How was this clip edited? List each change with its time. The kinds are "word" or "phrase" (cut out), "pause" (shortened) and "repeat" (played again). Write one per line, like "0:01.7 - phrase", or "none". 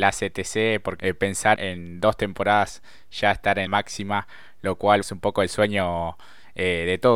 0:01.0 - phrase
0:01.6 - word
0:03.7 - word
0:05.0 - word